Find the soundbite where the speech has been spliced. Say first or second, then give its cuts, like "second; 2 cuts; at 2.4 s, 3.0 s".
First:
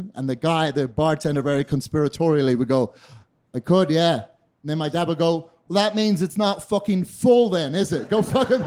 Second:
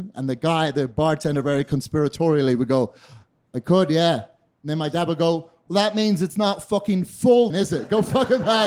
second; 1 cut; at 7.5 s